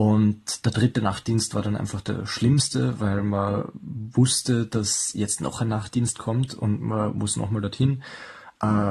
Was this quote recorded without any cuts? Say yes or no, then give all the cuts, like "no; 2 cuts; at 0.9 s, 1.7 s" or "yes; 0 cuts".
yes; 0 cuts